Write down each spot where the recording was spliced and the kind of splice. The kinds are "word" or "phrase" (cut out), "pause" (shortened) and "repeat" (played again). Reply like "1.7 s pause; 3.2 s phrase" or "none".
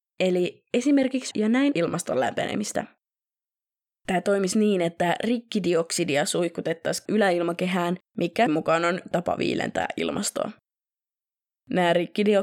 1.3 s word; 1.7 s word; 4.5 s word; 7.1 s word; 8.5 s word; 9.1 s word

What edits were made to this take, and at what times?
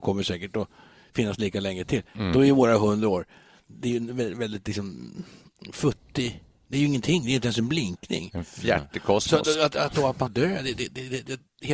10.3 s word

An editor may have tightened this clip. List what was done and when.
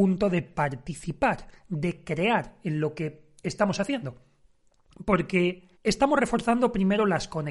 5.8 s pause

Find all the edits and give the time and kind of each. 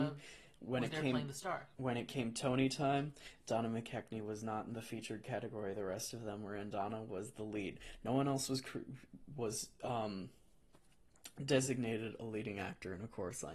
1.7 s pause

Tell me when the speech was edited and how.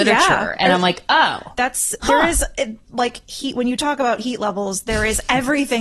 2.8 s pause

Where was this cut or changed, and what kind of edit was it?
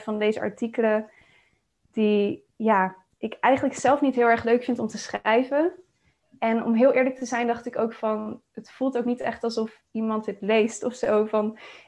9.9 s pause

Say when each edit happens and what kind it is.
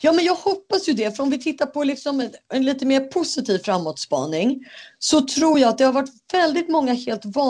none

